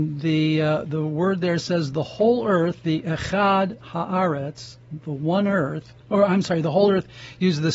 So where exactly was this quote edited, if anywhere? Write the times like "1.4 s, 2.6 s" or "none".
6.0 s